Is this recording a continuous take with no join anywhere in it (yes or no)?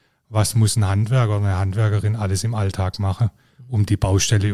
yes